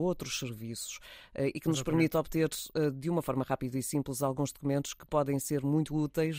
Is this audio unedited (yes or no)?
yes